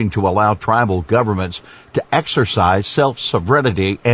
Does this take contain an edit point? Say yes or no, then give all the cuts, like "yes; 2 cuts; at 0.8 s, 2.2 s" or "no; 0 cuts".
no; 0 cuts